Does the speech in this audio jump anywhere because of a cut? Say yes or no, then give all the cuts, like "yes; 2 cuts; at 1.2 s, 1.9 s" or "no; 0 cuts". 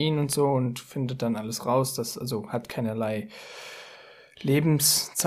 no; 0 cuts